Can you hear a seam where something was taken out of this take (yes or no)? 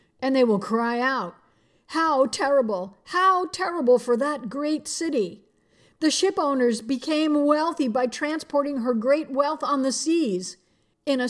no